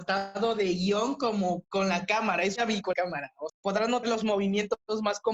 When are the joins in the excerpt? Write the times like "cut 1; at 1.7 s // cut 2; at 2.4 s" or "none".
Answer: cut 1; at 1.6 s // cut 2; at 2.6 s // cut 3; at 2.9 s // cut 4; at 3.5 s // cut 5; at 4.0 s

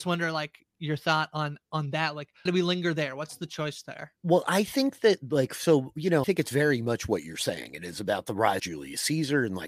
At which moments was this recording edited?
cut 1; at 2.5 s // cut 2; at 4.2 s // cut 3; at 6.2 s // cut 4; at 8.6 s

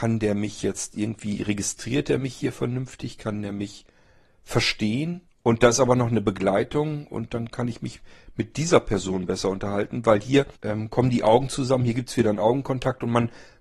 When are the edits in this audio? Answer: cut 1; at 5.3 s // cut 2; at 10.6 s

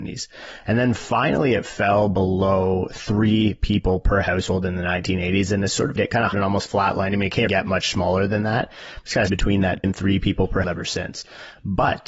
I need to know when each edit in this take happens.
cut 1; at 6.0 s // cut 2; at 6.3 s // cut 3; at 7.5 s // cut 4; at 9.3 s // cut 5; at 9.8 s // cut 6; at 10.6 s

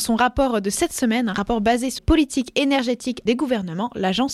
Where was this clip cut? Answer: cut 1; at 2.0 s // cut 2; at 3.3 s

